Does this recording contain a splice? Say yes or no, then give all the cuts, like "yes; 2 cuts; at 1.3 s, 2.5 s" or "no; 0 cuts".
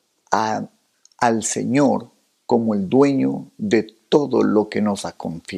no; 0 cuts